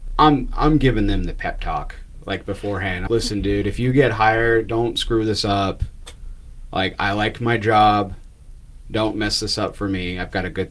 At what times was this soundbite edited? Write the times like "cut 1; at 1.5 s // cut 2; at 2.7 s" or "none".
cut 1; at 3.1 s